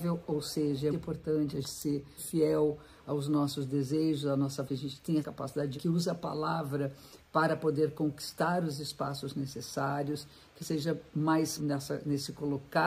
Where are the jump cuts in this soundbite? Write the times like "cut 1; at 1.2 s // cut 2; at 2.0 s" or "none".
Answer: cut 1; at 0.9 s // cut 2; at 1.6 s // cut 3; at 2.2 s // cut 4; at 4.7 s // cut 5; at 5.2 s // cut 6; at 5.8 s // cut 7; at 10.6 s // cut 8; at 11.6 s